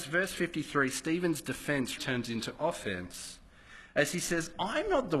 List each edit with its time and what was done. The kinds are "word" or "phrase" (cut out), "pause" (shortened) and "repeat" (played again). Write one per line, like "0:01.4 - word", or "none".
0:02.0 - word